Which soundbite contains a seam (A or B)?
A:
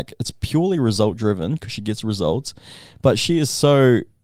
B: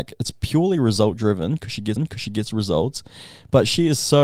B